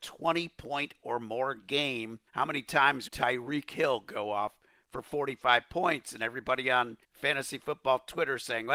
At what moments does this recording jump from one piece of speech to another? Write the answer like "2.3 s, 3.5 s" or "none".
2.3 s, 3.1 s, 7.0 s